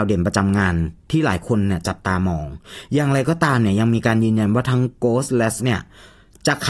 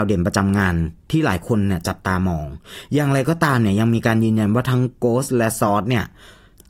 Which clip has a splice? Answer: first; 1 cut; at 5.6 s

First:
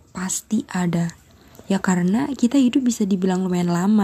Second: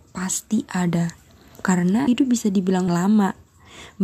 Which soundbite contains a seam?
second; 3 cuts; at 1.6 s, 2.1 s, 2.9 s

